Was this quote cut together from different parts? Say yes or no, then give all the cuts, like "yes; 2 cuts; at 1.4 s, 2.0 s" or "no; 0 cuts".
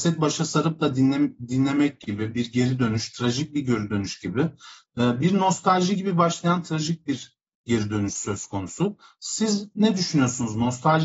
no; 0 cuts